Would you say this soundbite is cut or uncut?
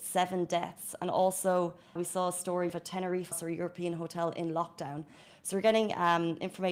cut